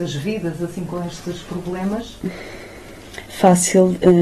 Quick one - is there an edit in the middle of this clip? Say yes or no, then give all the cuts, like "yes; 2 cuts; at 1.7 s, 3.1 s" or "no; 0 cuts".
yes; 1 cut; at 3.3 s